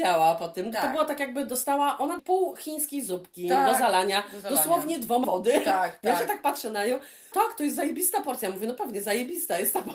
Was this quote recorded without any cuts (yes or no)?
no